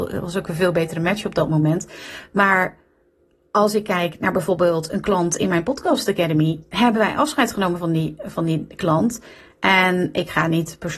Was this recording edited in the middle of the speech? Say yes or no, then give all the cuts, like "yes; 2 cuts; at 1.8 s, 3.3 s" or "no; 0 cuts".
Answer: no; 0 cuts